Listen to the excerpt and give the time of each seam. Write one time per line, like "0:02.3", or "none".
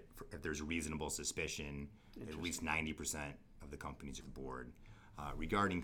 0:04.2

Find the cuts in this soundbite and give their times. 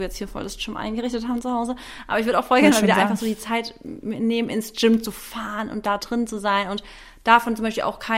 none

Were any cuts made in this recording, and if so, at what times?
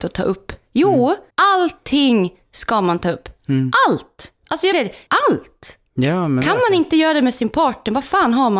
0:01.3
0:03.4
0:04.4
0:04.7
0:05.1

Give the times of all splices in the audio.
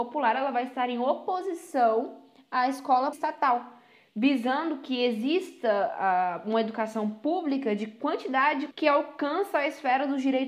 0:03.1
0:08.7

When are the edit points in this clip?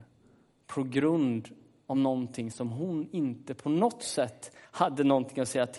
none

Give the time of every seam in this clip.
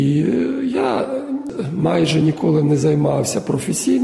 none

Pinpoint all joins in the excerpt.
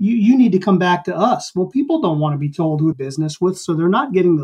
0:02.9

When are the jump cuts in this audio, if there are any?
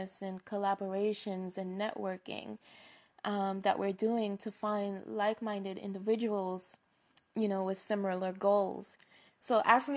none

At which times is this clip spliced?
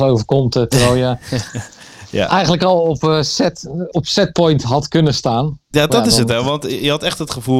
0:03.9
0:05.7

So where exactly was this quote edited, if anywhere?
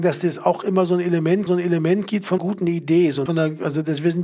0:01.5
0:02.4
0:03.3

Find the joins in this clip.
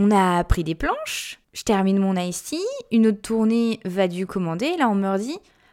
0:01.4
0:04.3

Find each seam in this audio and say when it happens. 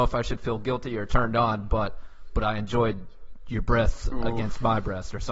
none

